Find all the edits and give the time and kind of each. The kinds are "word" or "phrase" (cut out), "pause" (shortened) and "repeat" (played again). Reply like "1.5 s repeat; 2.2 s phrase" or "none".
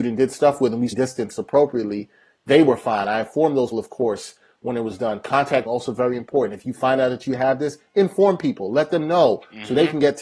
0.9 s word; 3.7 s word; 5.7 s word